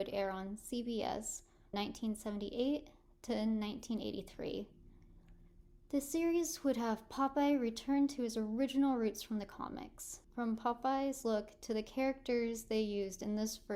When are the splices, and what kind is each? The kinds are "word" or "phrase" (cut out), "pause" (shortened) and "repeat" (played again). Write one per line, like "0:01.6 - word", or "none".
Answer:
0:01.7 - word
0:10.2 - pause